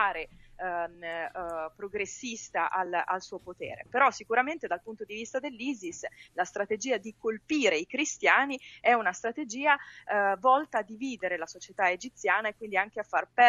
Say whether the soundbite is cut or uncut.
uncut